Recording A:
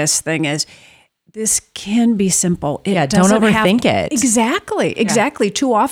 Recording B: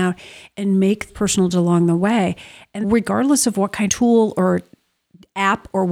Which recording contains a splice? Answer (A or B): B